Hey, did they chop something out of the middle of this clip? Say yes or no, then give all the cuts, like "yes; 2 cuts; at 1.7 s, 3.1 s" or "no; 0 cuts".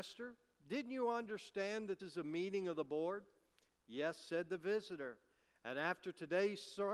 yes; 1 cut; at 2.0 s